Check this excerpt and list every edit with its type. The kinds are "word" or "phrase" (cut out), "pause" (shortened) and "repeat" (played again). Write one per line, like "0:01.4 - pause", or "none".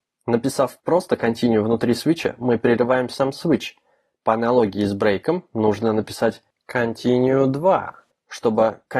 none